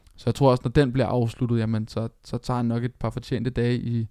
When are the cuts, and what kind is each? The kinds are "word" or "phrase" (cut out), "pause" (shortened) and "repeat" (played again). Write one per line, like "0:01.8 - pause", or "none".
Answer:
none